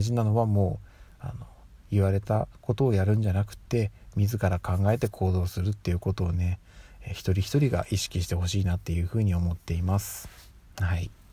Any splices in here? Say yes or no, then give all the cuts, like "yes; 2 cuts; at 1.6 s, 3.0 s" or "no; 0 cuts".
no; 0 cuts